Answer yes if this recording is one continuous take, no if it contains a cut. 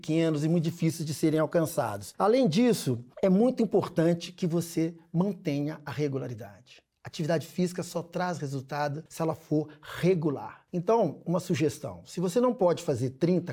yes